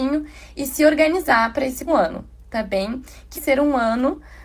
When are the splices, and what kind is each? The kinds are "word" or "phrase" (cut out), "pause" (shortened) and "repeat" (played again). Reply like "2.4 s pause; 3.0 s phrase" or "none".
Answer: 1.9 s word; 3.3 s word